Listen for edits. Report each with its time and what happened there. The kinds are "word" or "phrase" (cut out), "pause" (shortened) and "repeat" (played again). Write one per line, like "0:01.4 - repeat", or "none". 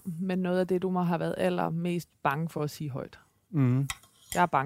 none